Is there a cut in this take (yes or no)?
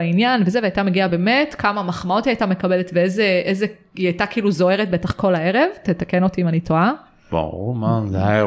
no